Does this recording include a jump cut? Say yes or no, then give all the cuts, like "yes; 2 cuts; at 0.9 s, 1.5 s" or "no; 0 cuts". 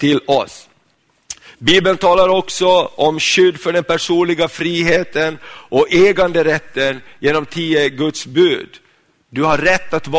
no; 0 cuts